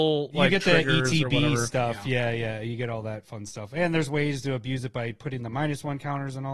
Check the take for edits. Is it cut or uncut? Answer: uncut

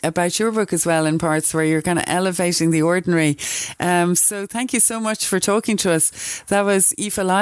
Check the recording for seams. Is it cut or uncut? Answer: uncut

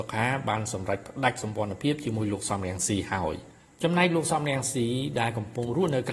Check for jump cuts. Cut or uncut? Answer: cut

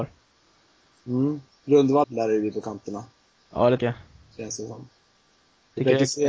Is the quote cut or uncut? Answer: cut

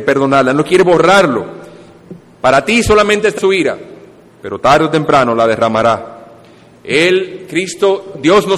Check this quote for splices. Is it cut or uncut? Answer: cut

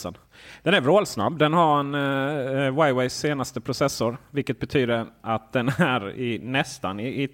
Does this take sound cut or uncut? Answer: uncut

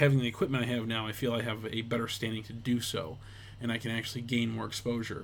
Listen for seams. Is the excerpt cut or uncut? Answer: uncut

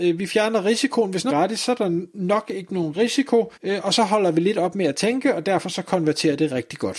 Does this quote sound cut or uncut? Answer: cut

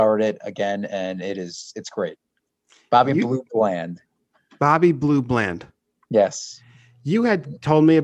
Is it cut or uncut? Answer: uncut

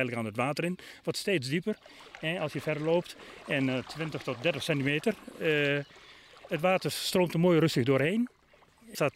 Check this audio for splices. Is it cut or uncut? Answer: uncut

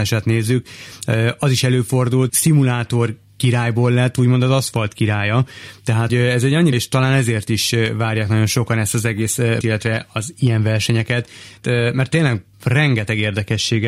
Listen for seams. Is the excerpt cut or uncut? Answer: cut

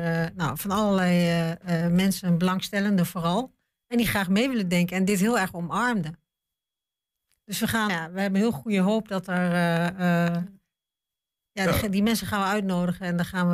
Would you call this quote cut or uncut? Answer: cut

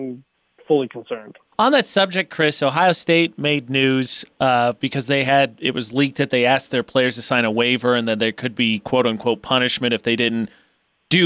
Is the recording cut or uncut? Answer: cut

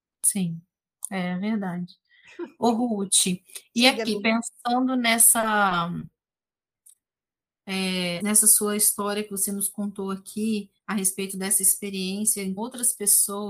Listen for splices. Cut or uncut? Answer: cut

